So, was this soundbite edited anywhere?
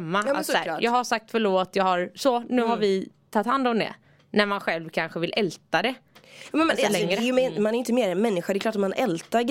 no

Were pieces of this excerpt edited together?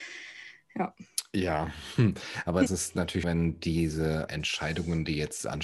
yes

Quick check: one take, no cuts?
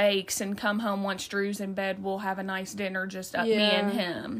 yes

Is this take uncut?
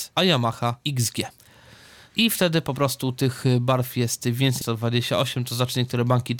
no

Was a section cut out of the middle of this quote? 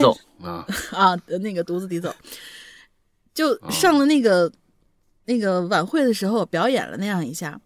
no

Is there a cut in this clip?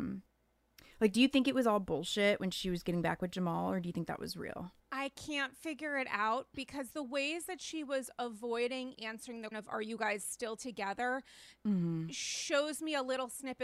yes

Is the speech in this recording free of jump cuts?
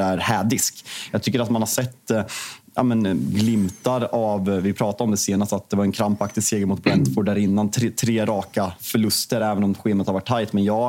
yes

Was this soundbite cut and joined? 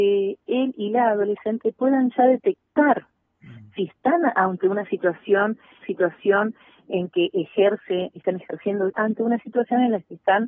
yes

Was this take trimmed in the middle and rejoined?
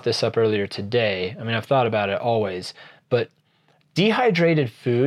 no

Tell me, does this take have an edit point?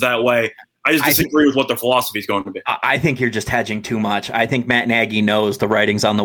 no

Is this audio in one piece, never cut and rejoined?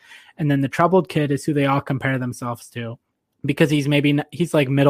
no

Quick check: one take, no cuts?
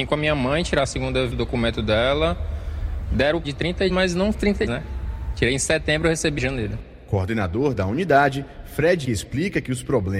no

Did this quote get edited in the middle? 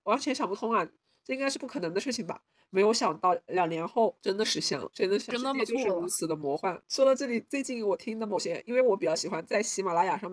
yes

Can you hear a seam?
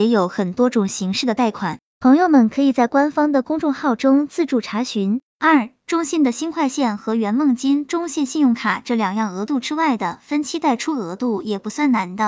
yes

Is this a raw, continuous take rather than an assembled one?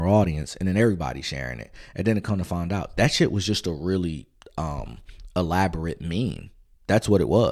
yes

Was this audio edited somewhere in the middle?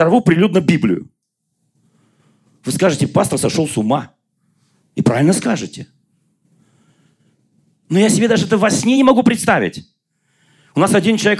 no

